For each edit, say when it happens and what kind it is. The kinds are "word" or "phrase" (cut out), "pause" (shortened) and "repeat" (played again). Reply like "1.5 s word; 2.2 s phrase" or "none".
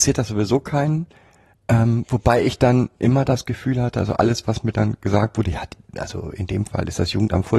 none